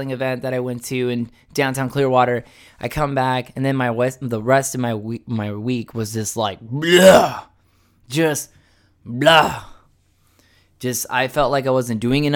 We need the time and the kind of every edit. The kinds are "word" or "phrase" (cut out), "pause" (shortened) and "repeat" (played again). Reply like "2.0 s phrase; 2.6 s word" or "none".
none